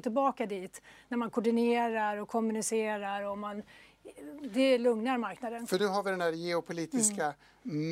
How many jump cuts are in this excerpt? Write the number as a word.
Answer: zero